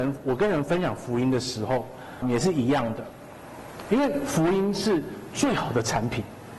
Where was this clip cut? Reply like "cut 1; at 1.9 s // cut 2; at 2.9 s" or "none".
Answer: cut 1; at 2.2 s